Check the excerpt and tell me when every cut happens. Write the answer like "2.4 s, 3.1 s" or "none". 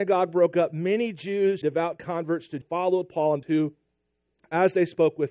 1.6 s, 2.6 s, 3.4 s